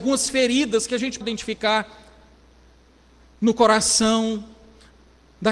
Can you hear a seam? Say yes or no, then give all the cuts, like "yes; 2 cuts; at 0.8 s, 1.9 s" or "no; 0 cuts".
yes; 1 cut; at 1.2 s